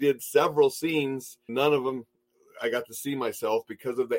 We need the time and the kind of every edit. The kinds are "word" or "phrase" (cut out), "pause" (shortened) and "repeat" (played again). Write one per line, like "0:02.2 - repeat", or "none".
0:01.5 - word